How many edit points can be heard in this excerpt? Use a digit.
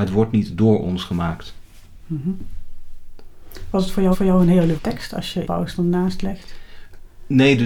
3